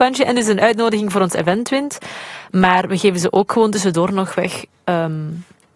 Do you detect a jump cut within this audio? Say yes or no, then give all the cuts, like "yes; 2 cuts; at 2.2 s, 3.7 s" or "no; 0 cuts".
no; 0 cuts